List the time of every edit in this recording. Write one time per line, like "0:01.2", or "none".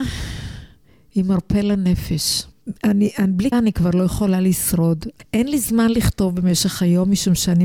0:02.5
0:03.5